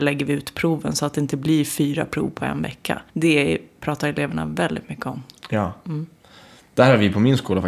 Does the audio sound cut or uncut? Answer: cut